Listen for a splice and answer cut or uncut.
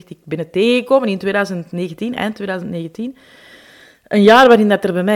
uncut